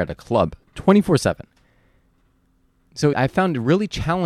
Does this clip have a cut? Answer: yes; 1 cut; at 3.1 s

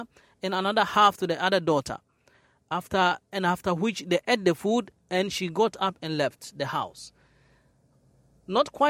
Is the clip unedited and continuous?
yes; 0 cuts

